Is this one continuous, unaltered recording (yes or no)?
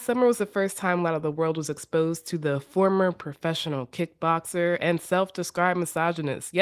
yes